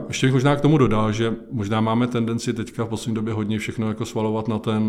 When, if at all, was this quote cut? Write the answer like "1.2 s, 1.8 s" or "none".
none